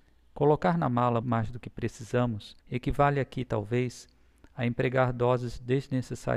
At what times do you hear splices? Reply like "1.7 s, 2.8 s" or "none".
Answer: 1.2 s, 2.6 s

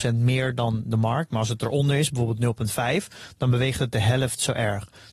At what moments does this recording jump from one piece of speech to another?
none

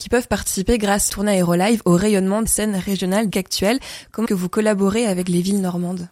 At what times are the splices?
1.1 s, 2.5 s, 3.3 s, 4.3 s

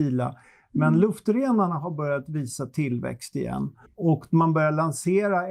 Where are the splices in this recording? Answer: 3.9 s

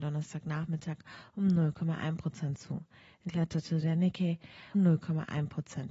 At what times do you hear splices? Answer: 3.3 s, 4.7 s

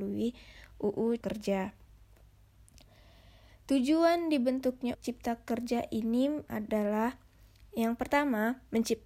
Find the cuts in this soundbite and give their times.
1.2 s, 4.9 s, 6.5 s

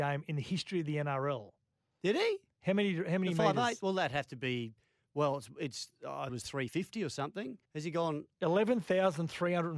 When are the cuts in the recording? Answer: 6.3 s, 7.7 s

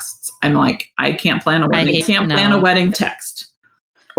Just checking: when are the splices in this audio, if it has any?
2.0 s, 2.9 s

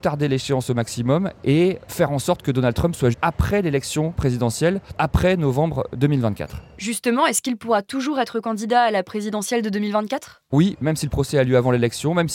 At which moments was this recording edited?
3.1 s, 4.9 s, 10.5 s

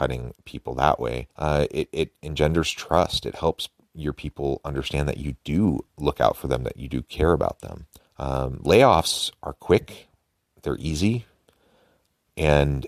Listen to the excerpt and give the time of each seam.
1.3 s, 5.9 s, 8.0 s

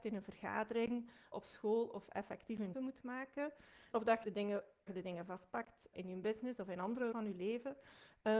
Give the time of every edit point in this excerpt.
1.3 s, 2.7 s, 3.9 s, 4.2 s, 4.9 s, 5.9 s, 7.1 s

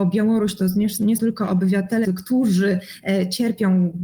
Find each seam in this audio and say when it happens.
1.2 s, 2.0 s

